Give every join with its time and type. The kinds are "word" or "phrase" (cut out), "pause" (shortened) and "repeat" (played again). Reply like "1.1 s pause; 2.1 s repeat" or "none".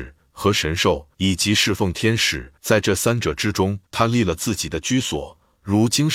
1.1 s pause; 2.6 s pause; 3.9 s pause